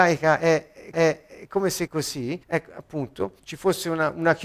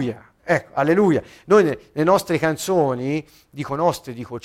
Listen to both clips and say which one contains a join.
first; 4 cuts; at 0.9 s, 1.9 s, 2.4 s, 3.4 s

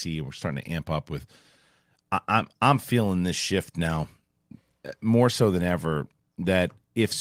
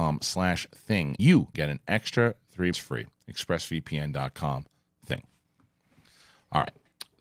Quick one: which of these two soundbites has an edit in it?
second; 4 cuts; at 1.2 s, 1.5 s, 2.7 s, 4.9 s

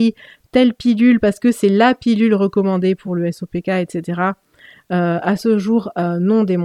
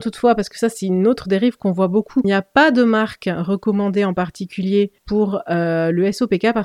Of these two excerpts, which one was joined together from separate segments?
second; 2 cuts; at 2.2 s, 5.0 s

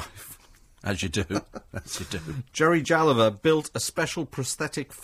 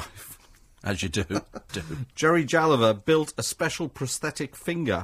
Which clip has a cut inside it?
second; 1 cut; at 1.7 s

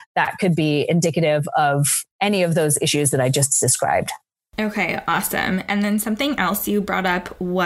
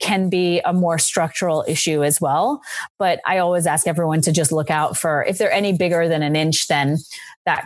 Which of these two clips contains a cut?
first; 1 cut; at 2.1 s

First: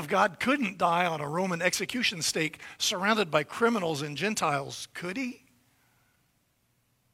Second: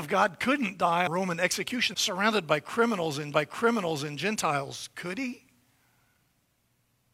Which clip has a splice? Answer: second; 3 cuts; at 1.1 s, 1.9 s, 3.3 s

